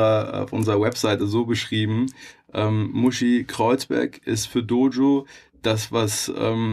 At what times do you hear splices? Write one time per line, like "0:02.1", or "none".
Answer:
none